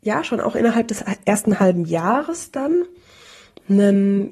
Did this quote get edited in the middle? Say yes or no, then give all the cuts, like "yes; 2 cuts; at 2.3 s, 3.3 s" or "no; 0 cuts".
no; 0 cuts